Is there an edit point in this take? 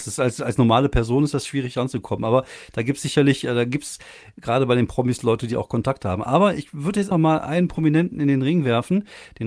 yes; 1 cut; at 7.1 s

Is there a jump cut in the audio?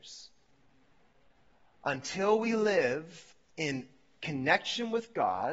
no; 0 cuts

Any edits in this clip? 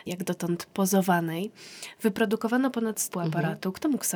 yes; 1 cut; at 3.1 s

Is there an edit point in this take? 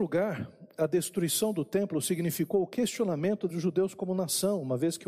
yes; 1 cut; at 3.5 s

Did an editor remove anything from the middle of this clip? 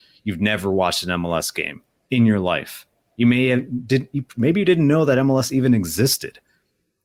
no; 0 cuts

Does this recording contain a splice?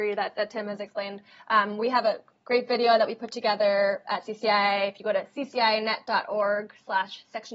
no; 0 cuts

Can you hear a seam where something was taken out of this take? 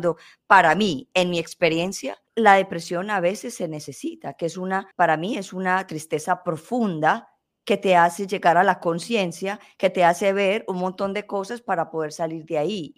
yes; 2 cuts; at 2.3 s, 4.9 s

